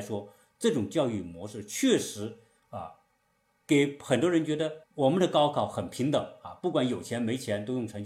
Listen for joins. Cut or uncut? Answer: cut